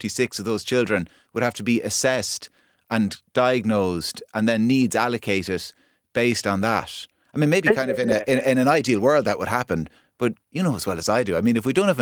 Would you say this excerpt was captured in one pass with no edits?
yes; 0 cuts

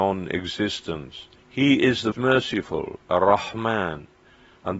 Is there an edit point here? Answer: yes; 2 cuts; at 1.4 s, 2.1 s

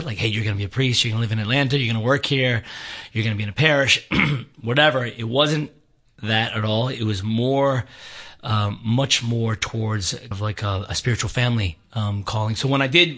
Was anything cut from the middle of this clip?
yes; 1 cut; at 10.3 s

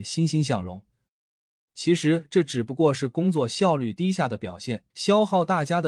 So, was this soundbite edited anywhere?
yes; 1 cut; at 4.9 s

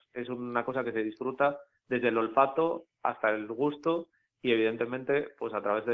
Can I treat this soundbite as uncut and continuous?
yes; 0 cuts

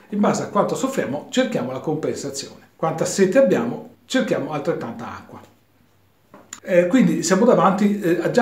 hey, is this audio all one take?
no; 3 cuts; at 2.7 s, 4.0 s, 6.6 s

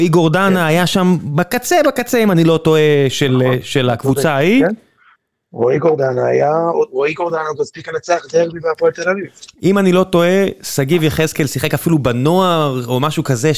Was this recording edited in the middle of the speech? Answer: no; 0 cuts

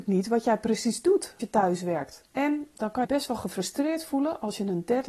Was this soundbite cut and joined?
yes; 3 cuts; at 1.4 s, 2.3 s, 3.0 s

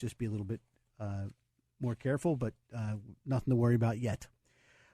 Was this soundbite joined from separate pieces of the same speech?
no; 0 cuts

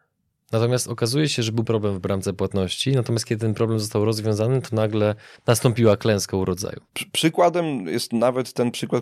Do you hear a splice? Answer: yes; 2 cuts; at 1.6 s, 5.4 s

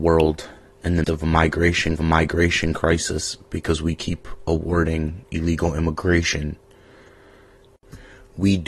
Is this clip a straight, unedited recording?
no; 2 cuts; at 1.0 s, 2.0 s

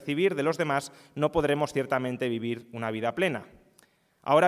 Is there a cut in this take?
no; 0 cuts

